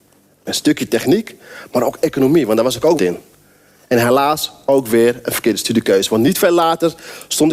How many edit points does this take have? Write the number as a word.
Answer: one